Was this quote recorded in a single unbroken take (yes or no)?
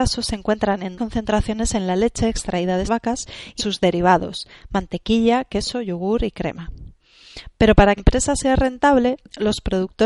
no